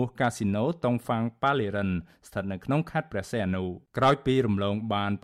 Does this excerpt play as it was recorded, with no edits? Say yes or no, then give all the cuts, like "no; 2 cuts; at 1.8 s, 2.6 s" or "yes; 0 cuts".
no; 1 cut; at 3.9 s